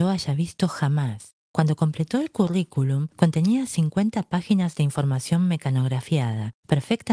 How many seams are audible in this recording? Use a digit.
2